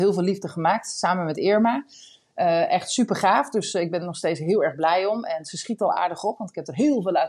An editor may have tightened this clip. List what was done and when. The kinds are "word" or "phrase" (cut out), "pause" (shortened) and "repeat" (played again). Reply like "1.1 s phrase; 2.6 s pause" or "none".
none